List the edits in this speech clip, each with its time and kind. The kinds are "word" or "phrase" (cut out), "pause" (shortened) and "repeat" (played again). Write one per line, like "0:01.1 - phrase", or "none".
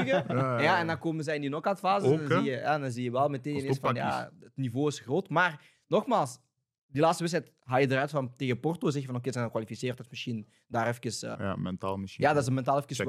0:11.3 - word